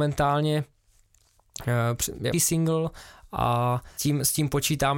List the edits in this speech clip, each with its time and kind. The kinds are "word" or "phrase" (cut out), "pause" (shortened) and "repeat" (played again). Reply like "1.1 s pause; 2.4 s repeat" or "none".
2.3 s phrase; 4.0 s word

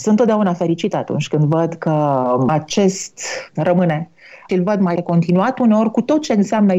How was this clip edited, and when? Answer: 3.6 s word; 4.5 s phrase; 5.0 s word

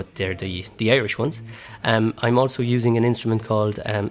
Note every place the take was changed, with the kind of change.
none

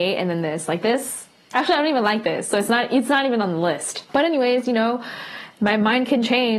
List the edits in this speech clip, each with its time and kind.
1.4 s pause; 4.1 s pause

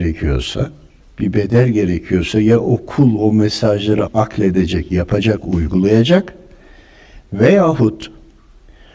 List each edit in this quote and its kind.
1.0 s pause; 4.1 s word

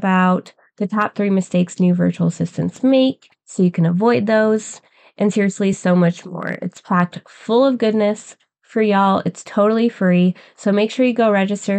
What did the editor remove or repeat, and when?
none

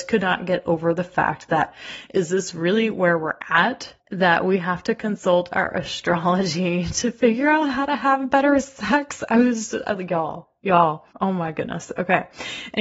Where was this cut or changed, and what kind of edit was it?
4.0 s pause; 11.1 s pause

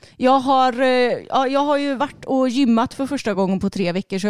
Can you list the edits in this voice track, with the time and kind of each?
none

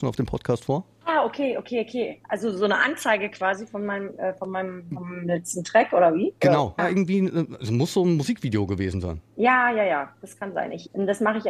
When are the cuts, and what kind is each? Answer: 6.8 s phrase; 9.3 s pause

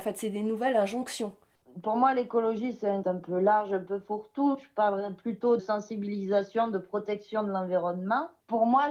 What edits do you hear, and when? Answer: 3.0 s word; 5.6 s word

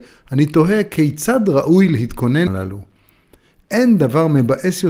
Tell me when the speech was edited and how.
2.5 s word

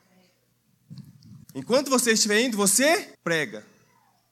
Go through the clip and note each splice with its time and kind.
1.4 s pause; 3.1 s pause

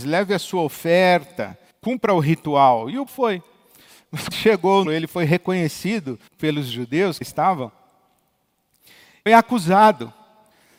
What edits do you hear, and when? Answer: 1.7 s pause; 3.1 s word; 4.3 s word; 4.8 s phrase; 6.3 s pause; 7.2 s word; 9.3 s word

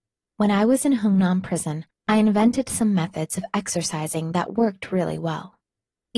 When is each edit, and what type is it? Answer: none

